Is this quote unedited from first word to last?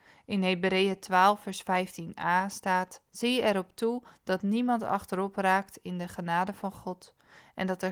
no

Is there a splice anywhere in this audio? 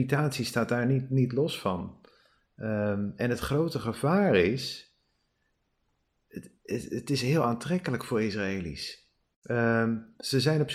no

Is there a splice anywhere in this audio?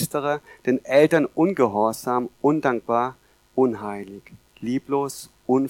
no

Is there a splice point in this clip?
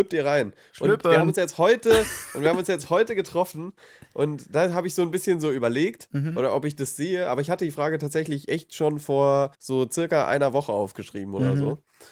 yes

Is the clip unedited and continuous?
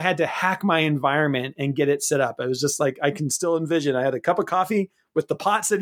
yes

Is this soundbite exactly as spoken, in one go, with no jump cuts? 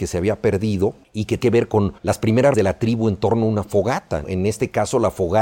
no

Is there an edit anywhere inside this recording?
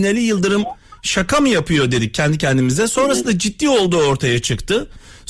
no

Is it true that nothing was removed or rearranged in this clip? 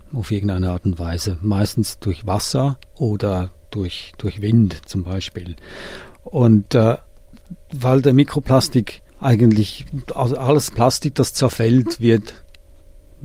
no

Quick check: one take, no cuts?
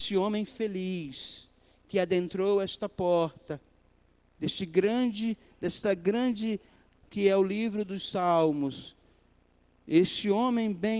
no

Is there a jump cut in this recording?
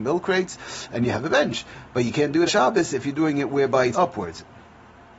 yes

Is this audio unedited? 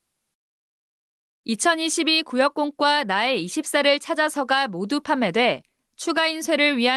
yes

